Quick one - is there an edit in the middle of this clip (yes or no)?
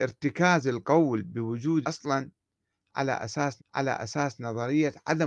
yes